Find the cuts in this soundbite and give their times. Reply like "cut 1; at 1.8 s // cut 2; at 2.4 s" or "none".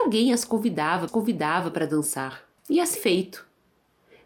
cut 1; at 1.1 s // cut 2; at 2.6 s // cut 3; at 3.0 s